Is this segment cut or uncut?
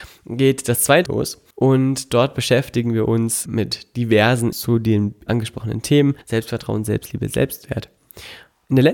cut